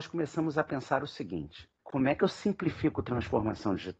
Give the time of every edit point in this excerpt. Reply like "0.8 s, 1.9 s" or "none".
1.8 s